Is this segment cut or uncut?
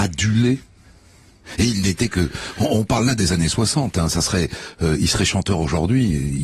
uncut